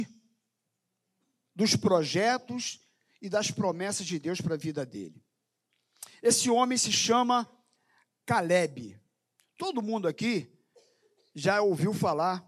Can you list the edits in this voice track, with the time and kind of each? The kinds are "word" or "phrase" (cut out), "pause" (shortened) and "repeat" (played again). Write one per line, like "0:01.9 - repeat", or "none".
none

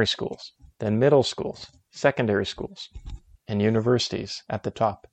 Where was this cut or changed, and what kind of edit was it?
none

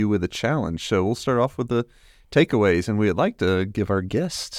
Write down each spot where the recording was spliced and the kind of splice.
none

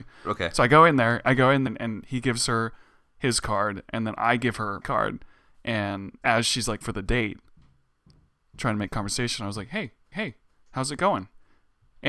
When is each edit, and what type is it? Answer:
0:01.7 - word
0:04.8 - word
0:06.2 - word
0:06.8 - word
0:10.1 - repeat

